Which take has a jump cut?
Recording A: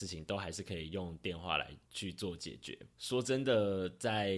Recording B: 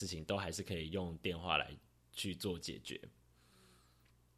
A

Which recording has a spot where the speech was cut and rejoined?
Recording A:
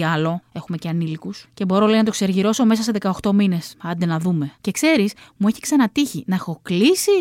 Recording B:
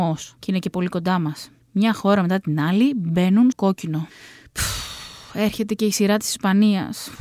B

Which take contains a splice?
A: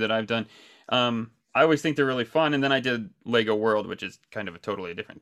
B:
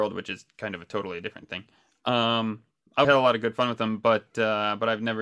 B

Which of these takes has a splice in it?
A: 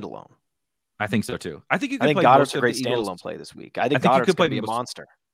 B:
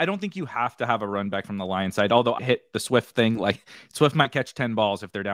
B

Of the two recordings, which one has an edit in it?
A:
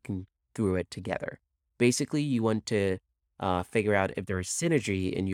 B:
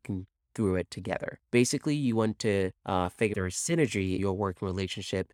B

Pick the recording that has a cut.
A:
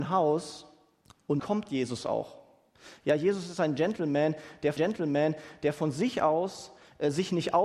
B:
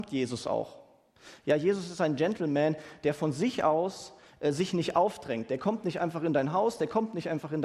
A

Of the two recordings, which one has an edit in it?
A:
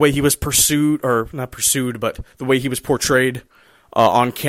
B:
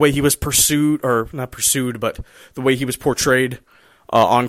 A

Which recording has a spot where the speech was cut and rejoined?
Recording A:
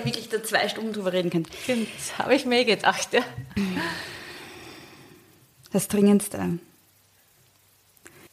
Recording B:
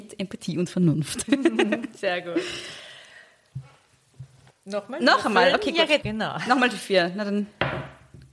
B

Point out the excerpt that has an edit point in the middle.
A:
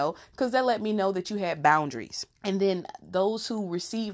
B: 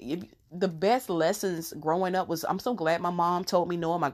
A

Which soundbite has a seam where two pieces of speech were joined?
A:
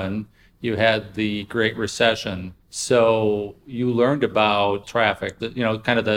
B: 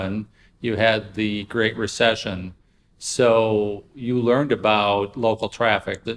A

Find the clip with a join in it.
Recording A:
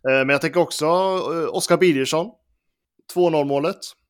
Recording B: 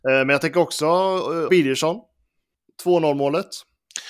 B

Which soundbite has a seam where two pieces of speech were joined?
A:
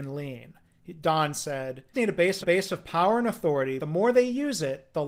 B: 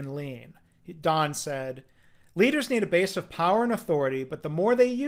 A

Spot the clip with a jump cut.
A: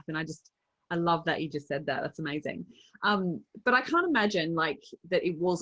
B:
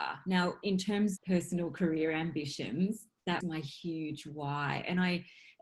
B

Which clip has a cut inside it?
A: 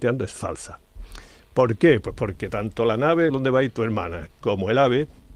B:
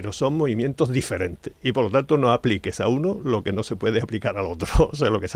A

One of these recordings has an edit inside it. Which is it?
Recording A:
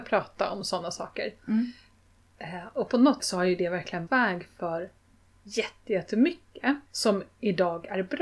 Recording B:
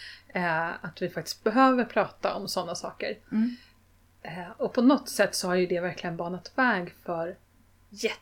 A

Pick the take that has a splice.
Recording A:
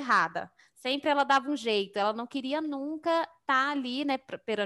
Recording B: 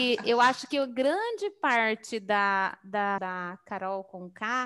B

